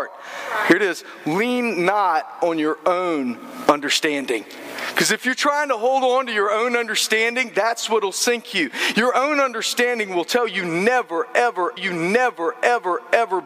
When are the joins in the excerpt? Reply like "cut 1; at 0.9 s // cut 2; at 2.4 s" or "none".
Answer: cut 1; at 11.8 s